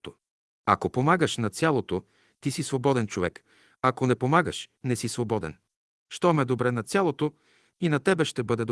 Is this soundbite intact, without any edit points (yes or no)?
no